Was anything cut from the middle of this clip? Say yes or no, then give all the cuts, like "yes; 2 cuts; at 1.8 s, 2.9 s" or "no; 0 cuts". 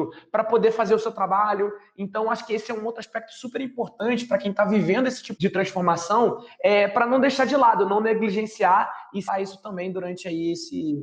yes; 2 cuts; at 5.4 s, 9.3 s